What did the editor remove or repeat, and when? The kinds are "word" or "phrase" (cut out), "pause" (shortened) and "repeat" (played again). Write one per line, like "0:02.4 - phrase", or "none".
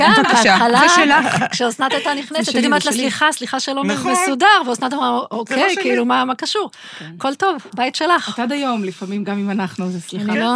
none